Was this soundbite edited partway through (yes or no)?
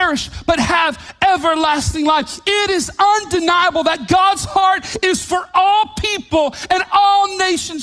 no